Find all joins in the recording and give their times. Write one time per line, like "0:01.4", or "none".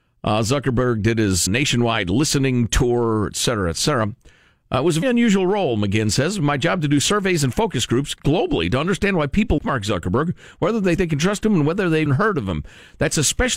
0:01.5
0:05.0
0:08.2
0:09.6
0:11.0
0:12.1